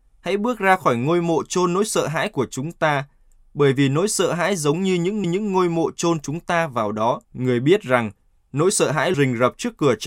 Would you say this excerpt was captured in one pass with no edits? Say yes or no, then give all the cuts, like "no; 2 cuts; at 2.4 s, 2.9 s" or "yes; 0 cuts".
no; 3 cuts; at 5.2 s, 7.2 s, 9.1 s